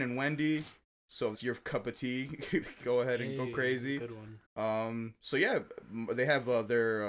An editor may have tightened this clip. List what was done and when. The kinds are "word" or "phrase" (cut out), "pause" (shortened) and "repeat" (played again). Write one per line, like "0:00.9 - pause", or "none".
0:01.3 - word
0:04.4 - pause